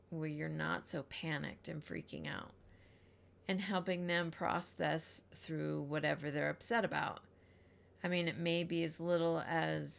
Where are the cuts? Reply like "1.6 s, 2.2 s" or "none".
none